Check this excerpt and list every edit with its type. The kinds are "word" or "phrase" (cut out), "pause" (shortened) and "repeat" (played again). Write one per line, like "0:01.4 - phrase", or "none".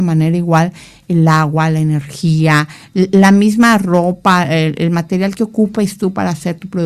none